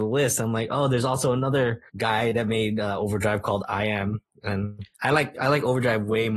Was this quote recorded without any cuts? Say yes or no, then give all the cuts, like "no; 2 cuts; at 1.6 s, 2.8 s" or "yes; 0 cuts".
no; 2 cuts; at 1.9 s, 4.9 s